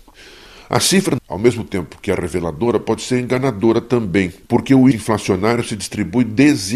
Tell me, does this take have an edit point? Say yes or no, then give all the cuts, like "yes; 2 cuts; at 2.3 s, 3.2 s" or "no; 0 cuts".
yes; 3 cuts; at 1.2 s, 4.4 s, 4.9 s